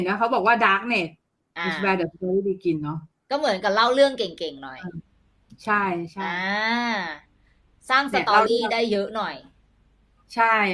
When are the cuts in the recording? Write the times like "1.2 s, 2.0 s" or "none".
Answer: none